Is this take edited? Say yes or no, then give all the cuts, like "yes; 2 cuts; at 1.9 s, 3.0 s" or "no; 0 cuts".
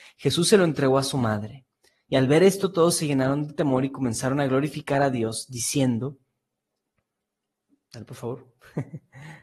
no; 0 cuts